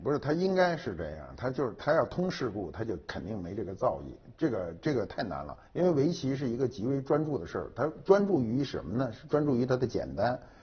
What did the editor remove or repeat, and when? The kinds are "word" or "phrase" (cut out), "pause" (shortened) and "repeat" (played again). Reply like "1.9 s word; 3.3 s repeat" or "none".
5.6 s pause